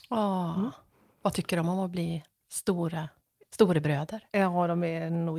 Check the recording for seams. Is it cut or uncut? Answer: uncut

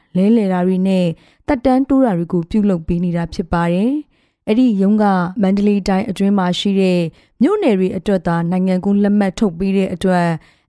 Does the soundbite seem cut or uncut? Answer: uncut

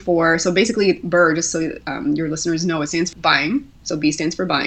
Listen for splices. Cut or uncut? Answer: cut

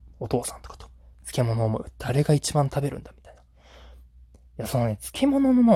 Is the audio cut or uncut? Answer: uncut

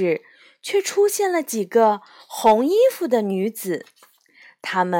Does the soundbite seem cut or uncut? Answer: uncut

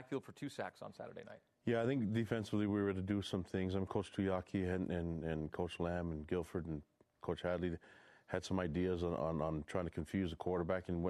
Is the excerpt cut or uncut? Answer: uncut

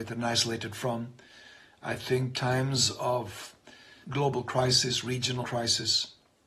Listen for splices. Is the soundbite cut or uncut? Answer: cut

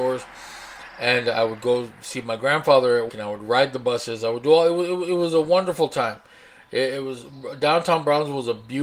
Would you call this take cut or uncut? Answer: cut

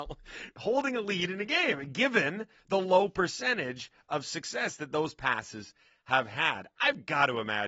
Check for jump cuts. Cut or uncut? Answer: uncut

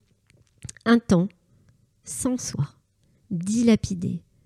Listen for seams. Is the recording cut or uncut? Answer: uncut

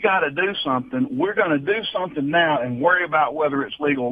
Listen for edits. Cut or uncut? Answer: uncut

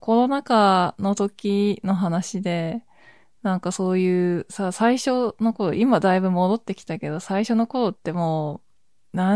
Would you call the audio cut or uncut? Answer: uncut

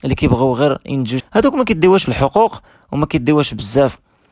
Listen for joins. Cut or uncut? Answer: cut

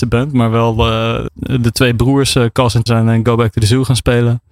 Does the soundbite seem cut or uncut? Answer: cut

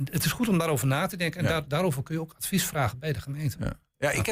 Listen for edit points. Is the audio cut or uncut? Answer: uncut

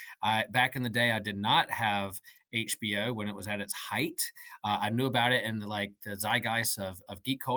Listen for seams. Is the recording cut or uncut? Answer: uncut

